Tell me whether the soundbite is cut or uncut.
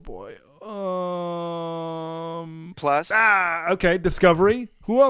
cut